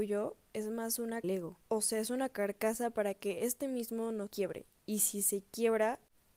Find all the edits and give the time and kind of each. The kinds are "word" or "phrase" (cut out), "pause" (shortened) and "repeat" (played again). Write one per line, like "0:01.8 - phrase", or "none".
0:01.2 - phrase
0:01.6 - pause
0:04.3 - word